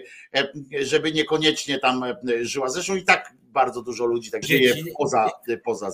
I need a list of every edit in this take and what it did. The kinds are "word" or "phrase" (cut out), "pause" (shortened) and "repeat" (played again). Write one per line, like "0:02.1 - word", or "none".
0:04.4 - phrase